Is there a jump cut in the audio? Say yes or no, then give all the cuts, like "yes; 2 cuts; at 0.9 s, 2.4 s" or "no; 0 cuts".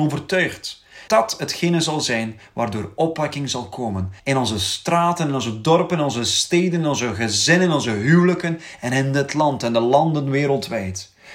yes; 2 cuts; at 1.1 s, 4.2 s